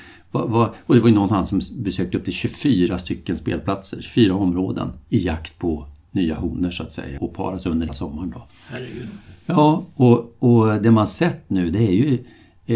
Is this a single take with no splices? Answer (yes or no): no